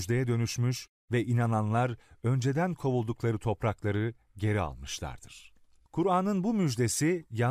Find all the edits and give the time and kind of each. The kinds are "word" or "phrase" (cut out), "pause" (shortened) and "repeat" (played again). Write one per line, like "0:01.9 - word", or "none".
none